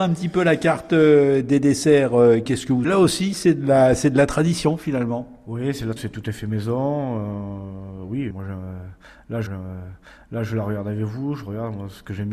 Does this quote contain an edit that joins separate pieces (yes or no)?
yes